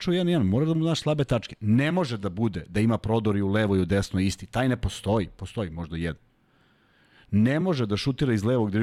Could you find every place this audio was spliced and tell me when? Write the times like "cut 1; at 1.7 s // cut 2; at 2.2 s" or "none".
none